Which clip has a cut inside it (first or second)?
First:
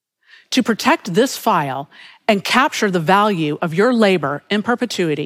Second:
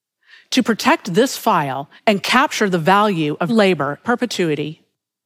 second